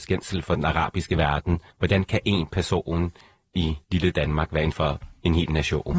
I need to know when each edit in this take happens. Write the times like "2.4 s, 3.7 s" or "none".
1.7 s, 3.8 s, 4.7 s